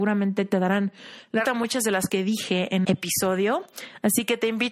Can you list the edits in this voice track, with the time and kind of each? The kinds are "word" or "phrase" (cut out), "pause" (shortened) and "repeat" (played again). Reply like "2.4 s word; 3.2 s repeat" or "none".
1.4 s word; 2.1 s word; 2.8 s word